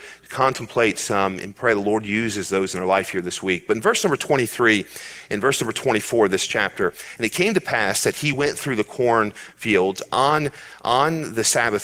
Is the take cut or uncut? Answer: uncut